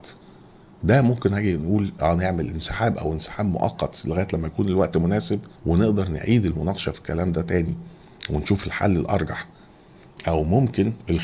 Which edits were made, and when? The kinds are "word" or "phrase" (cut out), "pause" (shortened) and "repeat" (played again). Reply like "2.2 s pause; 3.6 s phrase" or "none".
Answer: 5.6 s pause